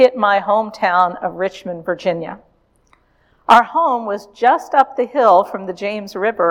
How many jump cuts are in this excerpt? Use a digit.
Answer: 0